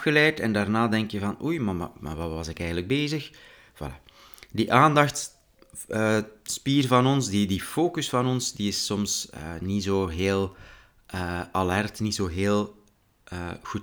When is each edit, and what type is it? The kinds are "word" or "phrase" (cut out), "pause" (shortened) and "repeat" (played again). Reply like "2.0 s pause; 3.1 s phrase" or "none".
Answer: none